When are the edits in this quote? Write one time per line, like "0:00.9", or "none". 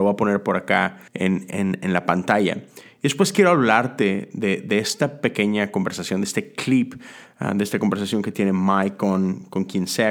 0:01.1